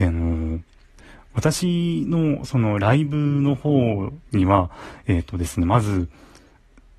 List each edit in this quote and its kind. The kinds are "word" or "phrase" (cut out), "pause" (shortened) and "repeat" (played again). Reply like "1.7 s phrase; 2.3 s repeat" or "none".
4.3 s pause